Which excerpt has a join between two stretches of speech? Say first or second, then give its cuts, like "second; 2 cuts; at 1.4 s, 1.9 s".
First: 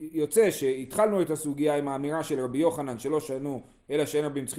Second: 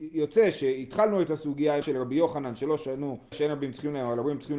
second; 2 cuts; at 1.8 s, 3.3 s